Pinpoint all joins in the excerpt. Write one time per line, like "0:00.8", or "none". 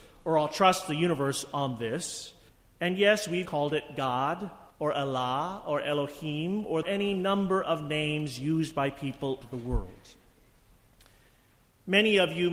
0:02.5
0:03.5
0:04.7
0:06.8
0:09.4